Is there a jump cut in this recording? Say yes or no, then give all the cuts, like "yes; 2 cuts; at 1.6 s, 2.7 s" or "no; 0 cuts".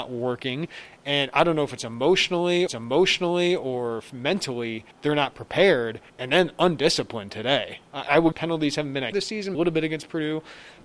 yes; 6 cuts; at 2.7 s, 4.9 s, 6.1 s, 8.3 s, 9.1 s, 9.5 s